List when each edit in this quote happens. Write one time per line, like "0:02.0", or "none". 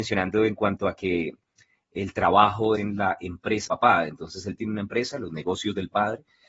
0:02.7
0:03.7
0:04.6